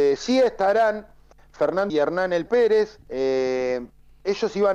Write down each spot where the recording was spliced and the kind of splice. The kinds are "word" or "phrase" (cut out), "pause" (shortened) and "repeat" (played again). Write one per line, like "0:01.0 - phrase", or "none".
0:01.9 - phrase
0:02.5 - word
0:03.0 - pause